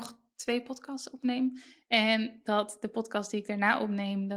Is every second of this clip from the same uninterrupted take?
yes; 0 cuts

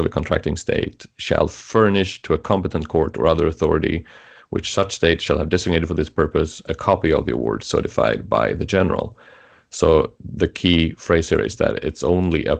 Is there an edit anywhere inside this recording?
no; 0 cuts

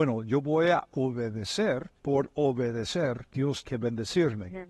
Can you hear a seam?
yes; 2 cuts; at 2.0 s, 3.6 s

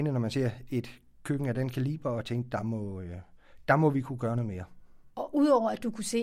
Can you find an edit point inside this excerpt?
no; 0 cuts

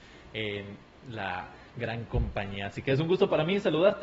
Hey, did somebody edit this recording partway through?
no; 0 cuts

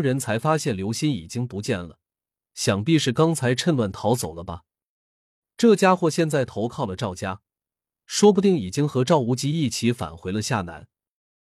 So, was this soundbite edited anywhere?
no; 0 cuts

